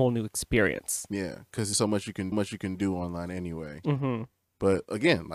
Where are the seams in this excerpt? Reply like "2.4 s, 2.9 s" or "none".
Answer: 1.7 s, 2.3 s